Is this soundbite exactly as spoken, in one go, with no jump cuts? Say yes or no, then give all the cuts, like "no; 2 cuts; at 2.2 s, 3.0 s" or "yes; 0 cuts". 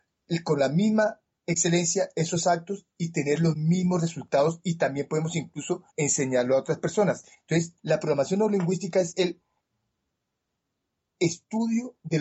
no; 2 cuts; at 5.9 s, 7.8 s